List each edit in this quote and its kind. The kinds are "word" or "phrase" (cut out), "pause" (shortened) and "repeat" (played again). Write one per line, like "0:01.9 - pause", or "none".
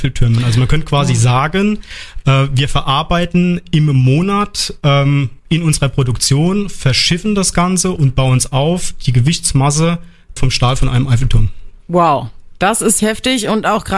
0:05.4 - pause
0:10.4 - word
0:11.8 - pause
0:13.0 - word